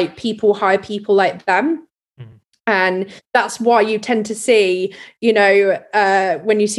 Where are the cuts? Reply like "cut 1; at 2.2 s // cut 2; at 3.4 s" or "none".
none